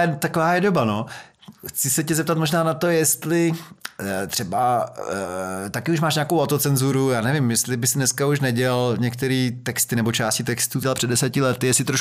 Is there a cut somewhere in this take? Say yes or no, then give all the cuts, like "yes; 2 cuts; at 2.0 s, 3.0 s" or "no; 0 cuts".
yes; 1 cut; at 10.8 s